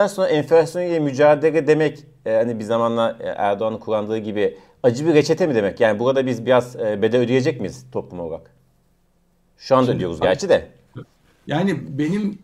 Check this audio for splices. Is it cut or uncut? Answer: uncut